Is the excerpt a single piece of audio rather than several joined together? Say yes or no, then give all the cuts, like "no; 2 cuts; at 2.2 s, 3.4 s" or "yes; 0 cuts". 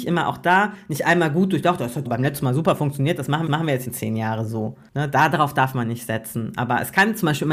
no; 3 cuts; at 2.0 s, 3.5 s, 3.8 s